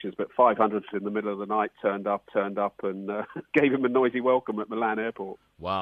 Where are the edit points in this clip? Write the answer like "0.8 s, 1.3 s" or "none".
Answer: 0.9 s, 2.3 s, 3.5 s